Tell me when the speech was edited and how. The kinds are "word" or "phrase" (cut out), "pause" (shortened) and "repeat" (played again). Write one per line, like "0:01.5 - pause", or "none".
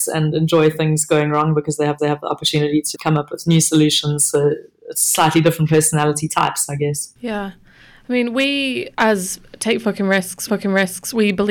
0:02.0 - repeat
0:02.9 - word
0:08.9 - pause
0:10.5 - repeat